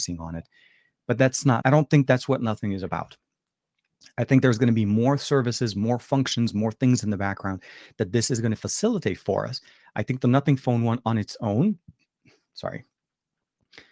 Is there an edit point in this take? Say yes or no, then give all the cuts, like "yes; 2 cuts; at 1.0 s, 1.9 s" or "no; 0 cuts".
yes; 1 cut; at 1.6 s